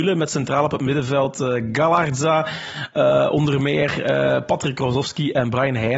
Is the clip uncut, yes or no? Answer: yes